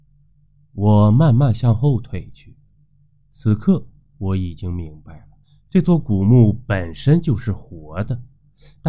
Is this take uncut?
no; 1 cut; at 5.4 s

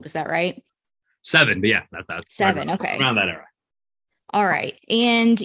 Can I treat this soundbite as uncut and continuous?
yes; 0 cuts

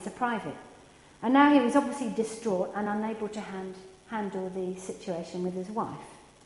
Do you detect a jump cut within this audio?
no; 0 cuts

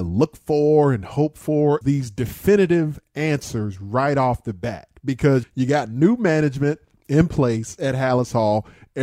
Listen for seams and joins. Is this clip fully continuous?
no; 2 cuts; at 1.8 s, 5.4 s

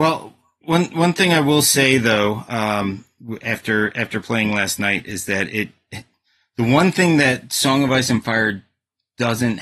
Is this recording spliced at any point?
no; 0 cuts

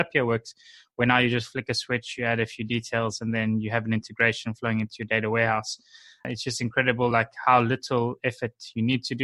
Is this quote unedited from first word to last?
yes; 0 cuts

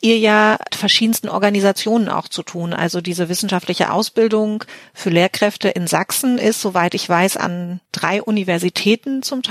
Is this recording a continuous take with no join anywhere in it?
no; 1 cut; at 7.9 s

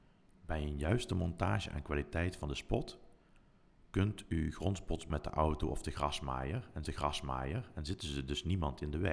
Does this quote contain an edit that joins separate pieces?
yes; 2 cuts; at 5.1 s, 6.8 s

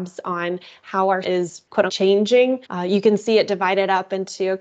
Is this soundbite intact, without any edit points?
no; 3 cuts; at 1.2 s, 1.9 s, 2.6 s

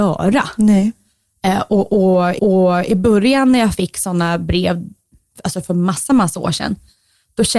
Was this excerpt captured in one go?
no; 1 cut; at 2.4 s

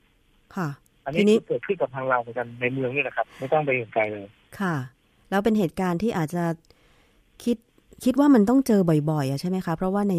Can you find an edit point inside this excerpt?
no; 0 cuts

